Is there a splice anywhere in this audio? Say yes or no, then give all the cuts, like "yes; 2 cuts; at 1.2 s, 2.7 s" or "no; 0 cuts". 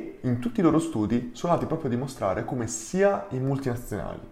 no; 0 cuts